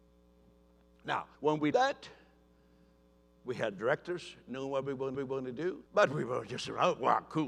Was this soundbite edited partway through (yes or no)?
yes